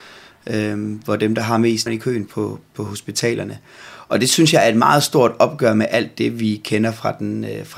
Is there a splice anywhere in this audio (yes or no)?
yes